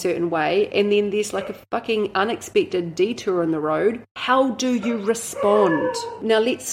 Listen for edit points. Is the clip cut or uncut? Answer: uncut